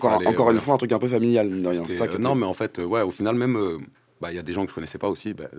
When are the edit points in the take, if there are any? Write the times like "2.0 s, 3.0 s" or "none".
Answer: none